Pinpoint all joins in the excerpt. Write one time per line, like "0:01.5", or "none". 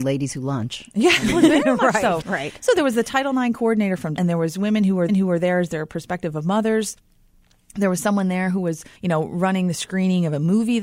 0:02.2
0:04.2
0:05.1
0:08.9